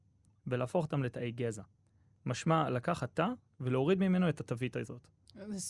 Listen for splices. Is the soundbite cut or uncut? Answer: uncut